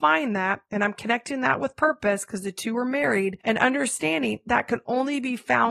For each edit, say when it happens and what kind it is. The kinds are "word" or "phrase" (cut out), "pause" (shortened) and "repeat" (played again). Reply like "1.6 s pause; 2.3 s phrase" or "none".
none